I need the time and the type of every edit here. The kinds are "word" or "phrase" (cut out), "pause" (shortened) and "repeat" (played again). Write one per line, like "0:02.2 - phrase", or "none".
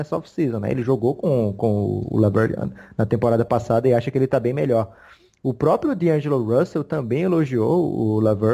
none